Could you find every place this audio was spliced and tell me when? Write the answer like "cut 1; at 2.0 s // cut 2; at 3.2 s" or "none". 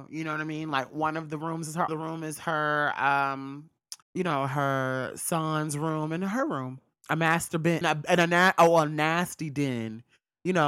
cut 1; at 1.9 s // cut 2; at 4.0 s // cut 3; at 7.8 s